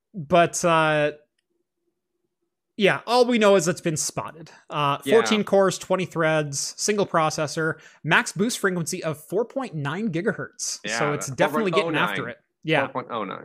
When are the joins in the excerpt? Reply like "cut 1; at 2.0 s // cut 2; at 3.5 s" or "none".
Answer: none